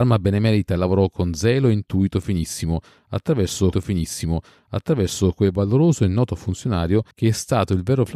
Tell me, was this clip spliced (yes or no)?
yes